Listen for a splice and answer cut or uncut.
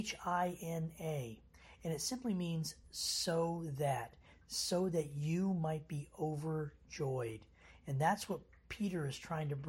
uncut